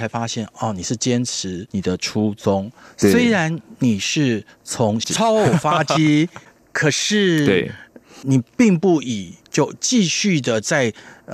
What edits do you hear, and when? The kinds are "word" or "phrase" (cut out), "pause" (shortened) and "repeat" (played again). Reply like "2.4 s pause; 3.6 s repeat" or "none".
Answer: none